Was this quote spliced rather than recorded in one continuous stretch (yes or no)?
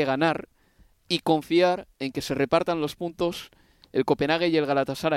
no